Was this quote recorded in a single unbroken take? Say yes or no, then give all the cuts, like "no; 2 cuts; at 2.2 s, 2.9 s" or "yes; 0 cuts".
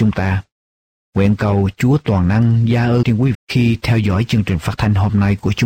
no; 2 cuts; at 3.0 s, 3.3 s